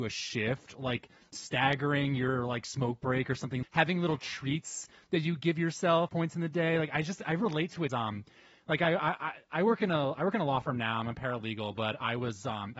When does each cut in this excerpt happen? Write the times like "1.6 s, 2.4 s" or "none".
3.6 s, 6.1 s, 7.9 s